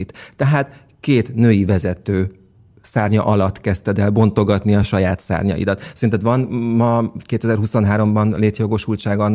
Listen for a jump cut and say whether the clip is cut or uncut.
uncut